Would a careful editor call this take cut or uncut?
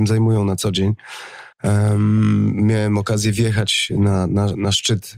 cut